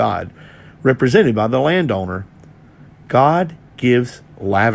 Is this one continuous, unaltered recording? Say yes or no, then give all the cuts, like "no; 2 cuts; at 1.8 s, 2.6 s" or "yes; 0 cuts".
yes; 0 cuts